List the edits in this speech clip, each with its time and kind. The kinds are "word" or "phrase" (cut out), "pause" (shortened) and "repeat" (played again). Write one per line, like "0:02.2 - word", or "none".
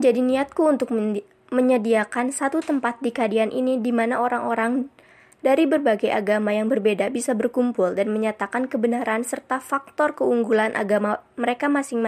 none